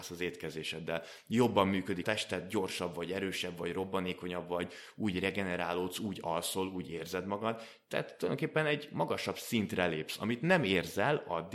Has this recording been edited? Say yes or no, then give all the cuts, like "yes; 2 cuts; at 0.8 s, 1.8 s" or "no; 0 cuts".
yes; 1 cut; at 2.0 s